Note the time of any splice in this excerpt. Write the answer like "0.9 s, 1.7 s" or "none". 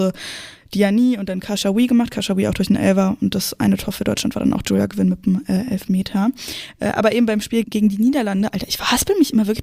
7.6 s